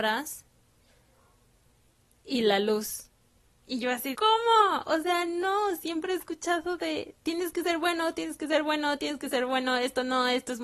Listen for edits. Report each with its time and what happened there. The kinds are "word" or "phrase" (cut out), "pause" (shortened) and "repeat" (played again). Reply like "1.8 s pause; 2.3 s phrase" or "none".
4.1 s word